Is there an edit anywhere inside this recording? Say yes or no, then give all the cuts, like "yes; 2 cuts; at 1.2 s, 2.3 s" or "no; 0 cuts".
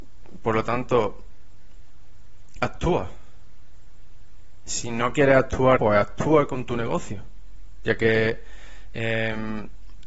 yes; 1 cut; at 5.8 s